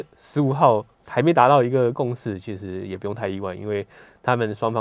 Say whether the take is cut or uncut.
cut